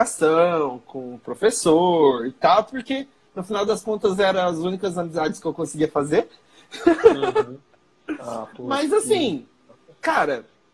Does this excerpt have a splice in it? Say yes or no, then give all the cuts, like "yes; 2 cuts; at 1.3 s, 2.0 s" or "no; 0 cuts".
no; 0 cuts